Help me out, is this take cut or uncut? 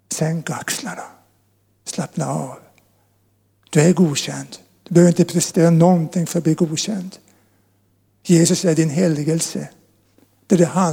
uncut